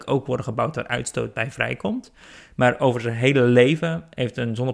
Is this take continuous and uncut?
yes; 0 cuts

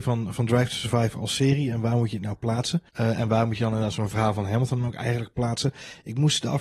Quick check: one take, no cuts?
no; 1 cut; at 2.9 s

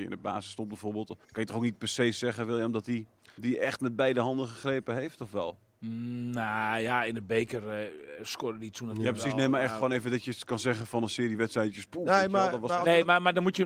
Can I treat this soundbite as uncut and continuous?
no; 2 cuts; at 1.2 s, 3.2 s

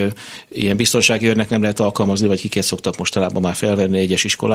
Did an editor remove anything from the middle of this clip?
no; 0 cuts

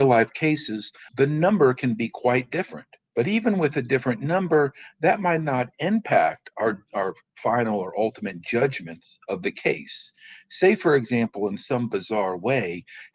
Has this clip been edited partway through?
yes; 2 cuts; at 1.1 s, 3.1 s

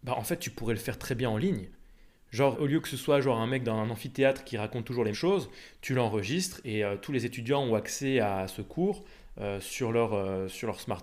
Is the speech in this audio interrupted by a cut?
yes; 2 cuts; at 2.5 s, 5.1 s

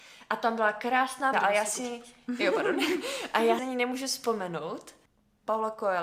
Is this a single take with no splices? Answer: no; 2 cuts; at 1.3 s, 3.6 s

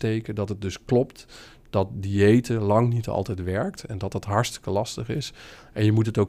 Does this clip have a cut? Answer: no; 0 cuts

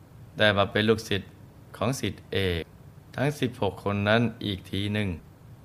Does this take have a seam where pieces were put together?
no; 0 cuts

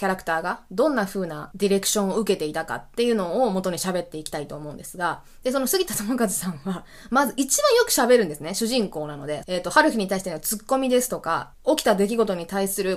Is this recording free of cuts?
no; 2 cuts; at 9.4 s, 11.5 s

